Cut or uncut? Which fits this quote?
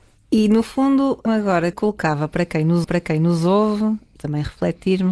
cut